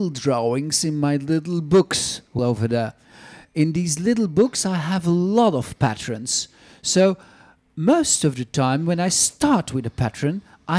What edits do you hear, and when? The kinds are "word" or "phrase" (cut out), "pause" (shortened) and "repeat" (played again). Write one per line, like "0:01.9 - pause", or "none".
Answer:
0:02.4 - phrase